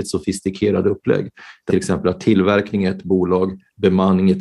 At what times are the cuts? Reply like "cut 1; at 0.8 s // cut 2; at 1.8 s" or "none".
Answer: cut 1; at 1.7 s